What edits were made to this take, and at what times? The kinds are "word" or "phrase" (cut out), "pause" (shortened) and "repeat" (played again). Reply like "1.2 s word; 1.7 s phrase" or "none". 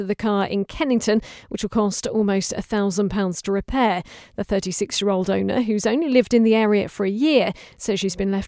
none